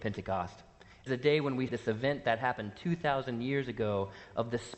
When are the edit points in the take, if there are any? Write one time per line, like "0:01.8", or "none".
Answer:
0:01.1
0:01.7